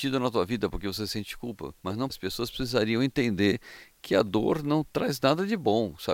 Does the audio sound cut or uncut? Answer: cut